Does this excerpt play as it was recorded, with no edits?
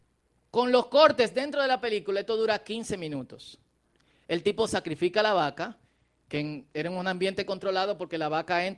yes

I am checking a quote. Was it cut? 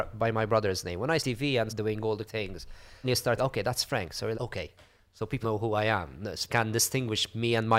yes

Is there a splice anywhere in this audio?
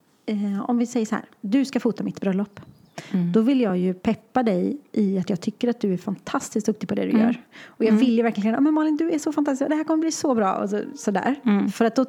no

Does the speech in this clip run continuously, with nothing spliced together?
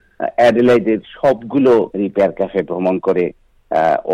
no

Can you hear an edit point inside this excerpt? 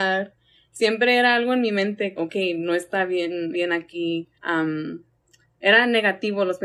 yes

